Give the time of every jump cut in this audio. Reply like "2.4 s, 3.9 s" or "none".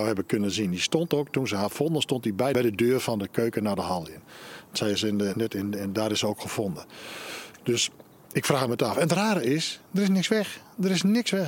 2.5 s, 5.3 s